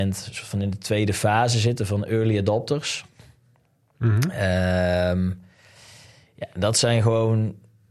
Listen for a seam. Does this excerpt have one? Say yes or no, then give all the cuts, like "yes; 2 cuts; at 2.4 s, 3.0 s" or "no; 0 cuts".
no; 0 cuts